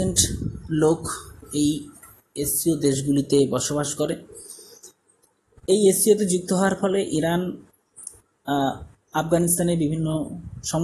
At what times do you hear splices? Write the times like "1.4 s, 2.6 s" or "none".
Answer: none